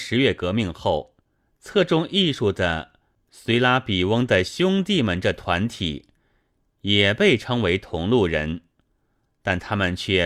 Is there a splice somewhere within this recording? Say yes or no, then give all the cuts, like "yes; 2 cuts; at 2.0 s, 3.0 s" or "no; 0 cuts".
no; 0 cuts